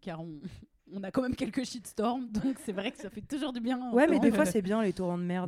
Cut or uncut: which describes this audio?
uncut